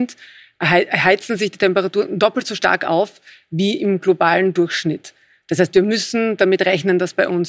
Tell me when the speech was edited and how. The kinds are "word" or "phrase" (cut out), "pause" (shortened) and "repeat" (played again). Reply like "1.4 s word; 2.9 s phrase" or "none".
none

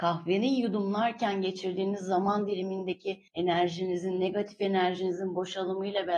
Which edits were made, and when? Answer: 3.3 s pause

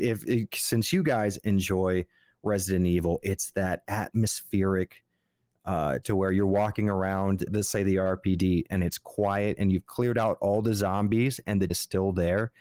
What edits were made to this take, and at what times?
6.0 s word; 7.5 s word; 11.7 s word

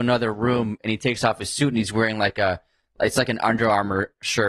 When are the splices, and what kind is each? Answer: none

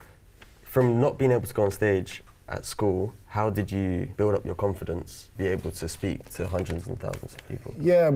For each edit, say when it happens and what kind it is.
none

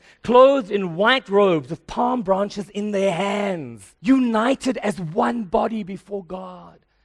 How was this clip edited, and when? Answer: 4.0 s pause

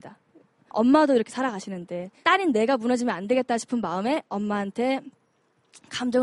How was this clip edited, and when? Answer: none

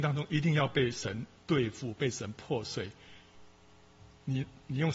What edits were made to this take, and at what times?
none

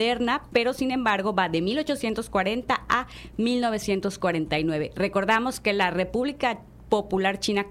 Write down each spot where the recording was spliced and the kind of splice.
none

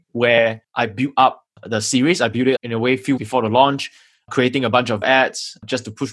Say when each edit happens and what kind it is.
2.6 s word; 3.2 s word; 5.0 s word

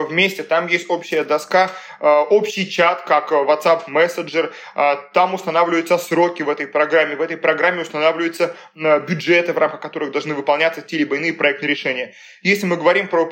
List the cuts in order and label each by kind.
none

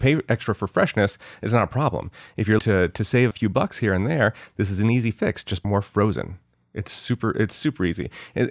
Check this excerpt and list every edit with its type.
2.6 s word; 3.3 s word; 5.6 s word

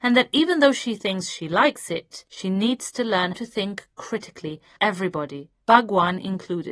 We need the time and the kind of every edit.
2.3 s pause; 3.3 s word; 4.8 s word; 5.6 s pause

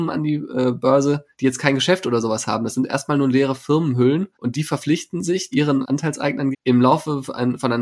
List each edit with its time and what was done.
1.3 s pause; 4.3 s pause; 5.5 s word; 6.5 s word

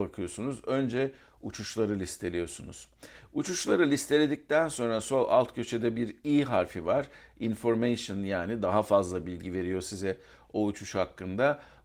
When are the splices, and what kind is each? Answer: none

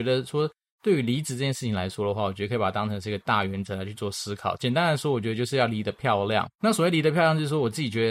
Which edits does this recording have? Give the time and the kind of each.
6.5 s pause

